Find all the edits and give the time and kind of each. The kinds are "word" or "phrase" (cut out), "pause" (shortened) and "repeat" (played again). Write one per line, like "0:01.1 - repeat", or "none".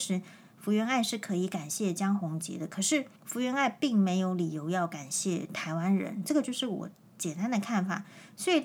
0:03.1 - pause